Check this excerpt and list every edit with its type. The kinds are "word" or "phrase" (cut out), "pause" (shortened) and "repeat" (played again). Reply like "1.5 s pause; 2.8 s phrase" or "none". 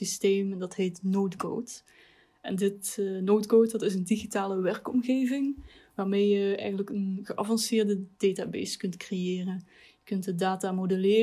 none